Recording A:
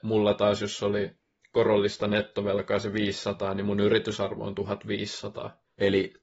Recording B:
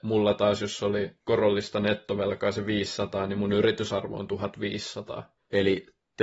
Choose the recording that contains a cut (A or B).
B